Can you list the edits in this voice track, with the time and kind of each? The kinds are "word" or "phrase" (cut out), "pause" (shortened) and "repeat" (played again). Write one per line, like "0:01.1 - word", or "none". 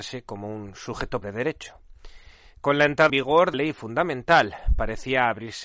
0:01.2 - word
0:03.1 - word
0:03.5 - word